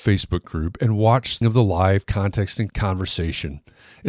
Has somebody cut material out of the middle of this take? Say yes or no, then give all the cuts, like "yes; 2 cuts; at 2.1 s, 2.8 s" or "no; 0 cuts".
yes; 2 cuts; at 1.4 s, 2.7 s